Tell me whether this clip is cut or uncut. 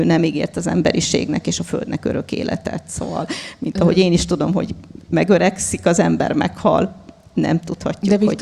uncut